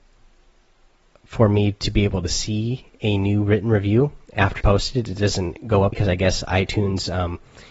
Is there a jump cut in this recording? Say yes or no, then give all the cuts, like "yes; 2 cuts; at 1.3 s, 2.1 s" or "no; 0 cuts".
yes; 2 cuts; at 4.6 s, 5.9 s